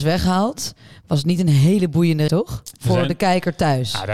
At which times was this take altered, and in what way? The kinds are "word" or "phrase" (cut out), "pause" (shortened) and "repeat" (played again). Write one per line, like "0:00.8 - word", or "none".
0:02.3 - word